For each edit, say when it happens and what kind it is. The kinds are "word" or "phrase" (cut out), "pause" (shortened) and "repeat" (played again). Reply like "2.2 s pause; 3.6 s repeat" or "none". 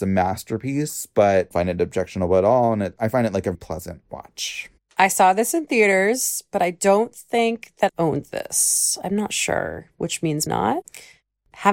1.5 s phrase; 3.5 s word; 7.9 s word; 10.5 s word